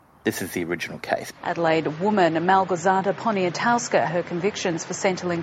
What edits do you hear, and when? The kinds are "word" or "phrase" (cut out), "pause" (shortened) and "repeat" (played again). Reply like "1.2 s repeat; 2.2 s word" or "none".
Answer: 1.3 s pause; 4.1 s word